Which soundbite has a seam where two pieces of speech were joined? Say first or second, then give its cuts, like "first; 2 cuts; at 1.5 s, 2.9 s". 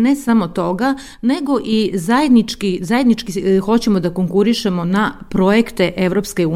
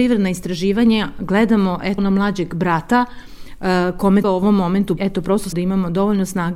second; 4 cuts; at 2.0 s, 4.2 s, 5.0 s, 5.5 s